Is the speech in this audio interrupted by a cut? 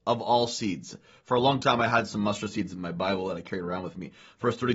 no; 0 cuts

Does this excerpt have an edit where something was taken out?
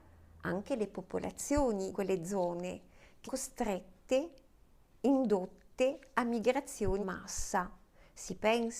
yes; 3 cuts; at 1.9 s, 3.3 s, 7.0 s

